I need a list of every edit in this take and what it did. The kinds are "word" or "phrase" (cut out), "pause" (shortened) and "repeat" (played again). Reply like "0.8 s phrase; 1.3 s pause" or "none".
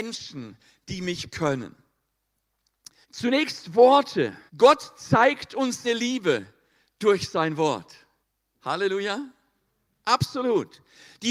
1.3 s word; 3.0 s pause; 4.5 s pause; 5.8 s word; 8.2 s pause